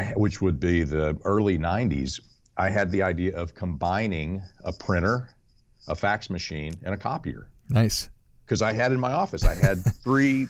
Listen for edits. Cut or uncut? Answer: uncut